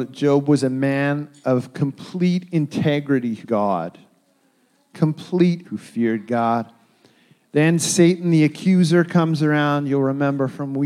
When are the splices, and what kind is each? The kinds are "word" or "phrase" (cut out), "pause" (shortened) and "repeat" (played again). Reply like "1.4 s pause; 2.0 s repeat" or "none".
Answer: 3.4 s word; 5.6 s word